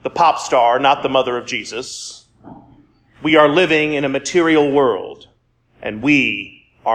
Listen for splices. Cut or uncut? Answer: uncut